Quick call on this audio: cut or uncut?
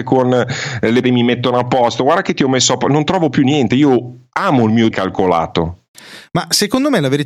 cut